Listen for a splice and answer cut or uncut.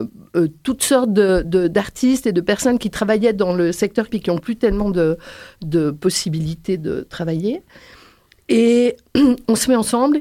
cut